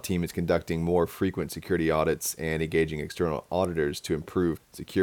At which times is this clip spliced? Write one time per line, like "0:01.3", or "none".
none